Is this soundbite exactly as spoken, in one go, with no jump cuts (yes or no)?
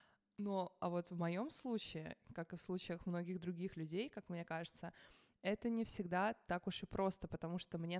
yes